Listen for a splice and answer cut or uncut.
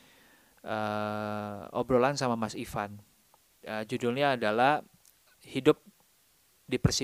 uncut